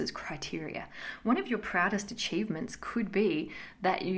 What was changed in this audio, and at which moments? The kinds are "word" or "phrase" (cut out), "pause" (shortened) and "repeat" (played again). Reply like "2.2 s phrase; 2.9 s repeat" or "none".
none